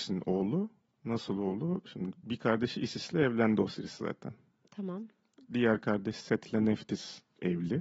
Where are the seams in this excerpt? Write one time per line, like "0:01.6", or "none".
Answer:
none